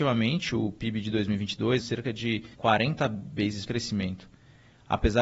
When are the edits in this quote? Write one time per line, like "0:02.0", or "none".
0:01.8
0:02.5
0:03.7